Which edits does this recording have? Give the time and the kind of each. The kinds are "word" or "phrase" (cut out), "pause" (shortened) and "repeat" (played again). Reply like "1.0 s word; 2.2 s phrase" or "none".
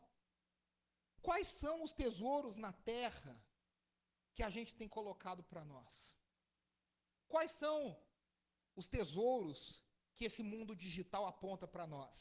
none